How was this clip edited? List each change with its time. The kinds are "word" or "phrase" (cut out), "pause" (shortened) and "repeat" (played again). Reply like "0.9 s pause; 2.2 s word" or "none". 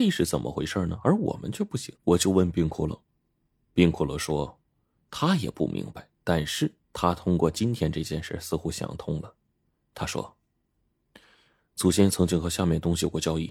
2.0 s pause; 6.8 s pause